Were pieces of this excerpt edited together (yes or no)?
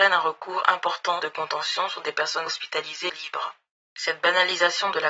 yes